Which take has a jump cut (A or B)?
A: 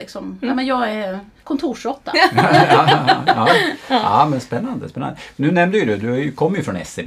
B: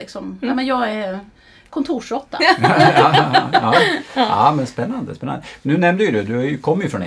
A